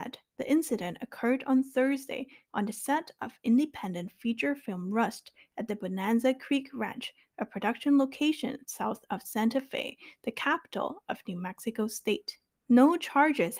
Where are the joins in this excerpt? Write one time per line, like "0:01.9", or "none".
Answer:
0:12.5